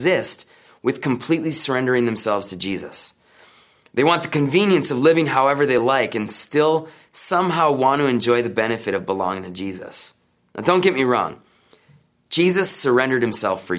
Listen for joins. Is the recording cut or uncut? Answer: uncut